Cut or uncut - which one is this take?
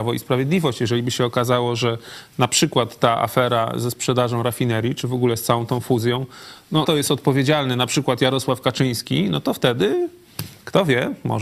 cut